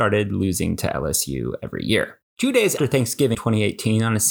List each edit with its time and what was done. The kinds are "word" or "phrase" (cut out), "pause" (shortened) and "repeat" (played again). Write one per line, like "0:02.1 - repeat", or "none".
0:02.3 - pause
0:02.8 - word
0:03.3 - word